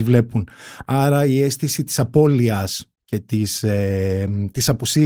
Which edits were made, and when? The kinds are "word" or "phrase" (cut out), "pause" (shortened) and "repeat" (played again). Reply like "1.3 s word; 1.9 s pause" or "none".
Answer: 2.9 s pause